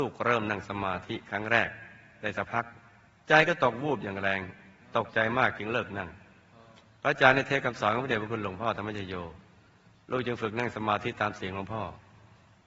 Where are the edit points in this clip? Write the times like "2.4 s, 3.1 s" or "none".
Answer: none